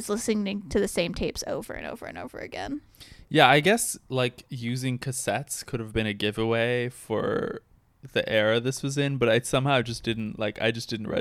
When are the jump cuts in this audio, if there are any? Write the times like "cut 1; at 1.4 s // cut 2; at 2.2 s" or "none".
none

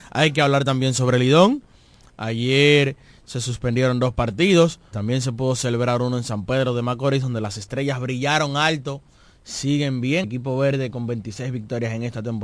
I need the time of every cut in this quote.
cut 1; at 4.9 s // cut 2; at 10.2 s

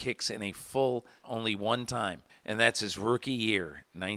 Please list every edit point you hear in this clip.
cut 1; at 1.2 s // cut 2; at 2.3 s

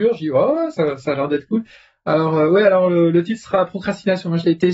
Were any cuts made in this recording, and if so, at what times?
none

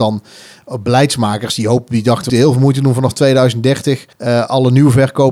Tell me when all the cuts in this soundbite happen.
cut 1; at 2.3 s // cut 2; at 4.1 s

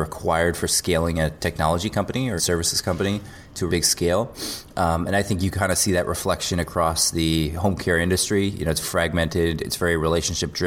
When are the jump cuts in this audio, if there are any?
cut 1; at 2.4 s // cut 2; at 3.7 s // cut 3; at 8.8 s

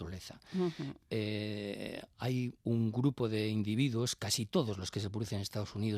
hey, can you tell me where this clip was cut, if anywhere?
cut 1; at 2.6 s

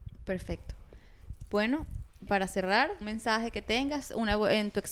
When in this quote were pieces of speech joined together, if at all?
cut 1; at 2.3 s // cut 2; at 3.0 s

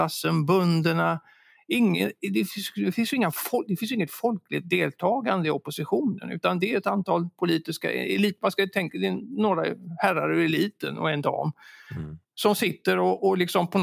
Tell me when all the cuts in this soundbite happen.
cut 1; at 12.2 s

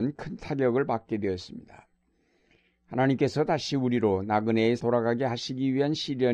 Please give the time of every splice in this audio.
cut 1; at 4.8 s

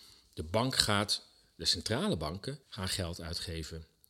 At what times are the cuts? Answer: cut 1; at 2.6 s

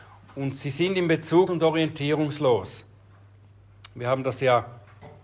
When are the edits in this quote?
cut 1; at 1.5 s

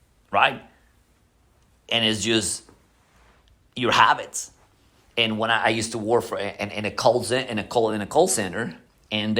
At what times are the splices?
none

